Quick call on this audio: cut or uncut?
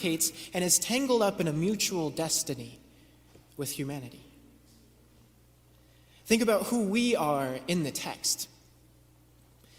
uncut